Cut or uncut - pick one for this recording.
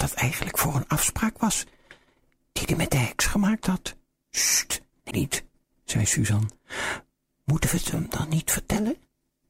cut